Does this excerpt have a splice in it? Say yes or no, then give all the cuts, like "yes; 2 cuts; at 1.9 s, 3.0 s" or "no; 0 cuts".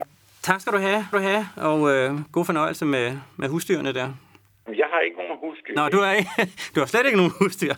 yes; 1 cut; at 1.1 s